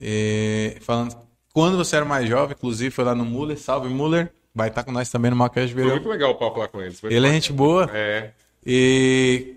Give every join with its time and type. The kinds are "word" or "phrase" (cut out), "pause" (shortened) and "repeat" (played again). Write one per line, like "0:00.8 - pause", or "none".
none